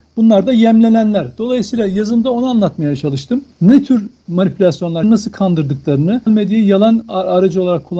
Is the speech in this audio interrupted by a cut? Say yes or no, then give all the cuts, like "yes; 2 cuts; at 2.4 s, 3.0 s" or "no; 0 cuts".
yes; 3 cuts; at 3.5 s, 5.0 s, 6.3 s